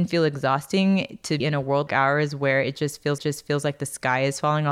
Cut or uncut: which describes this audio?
cut